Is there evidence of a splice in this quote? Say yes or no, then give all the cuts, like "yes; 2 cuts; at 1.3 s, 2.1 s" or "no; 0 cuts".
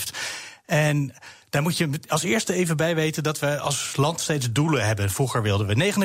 no; 0 cuts